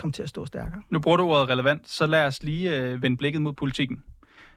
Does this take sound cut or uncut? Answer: uncut